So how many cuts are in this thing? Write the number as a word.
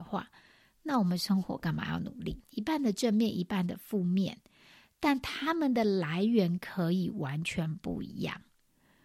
zero